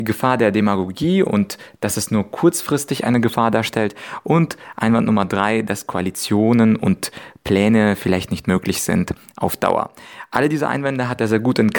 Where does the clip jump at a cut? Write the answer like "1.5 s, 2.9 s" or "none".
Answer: none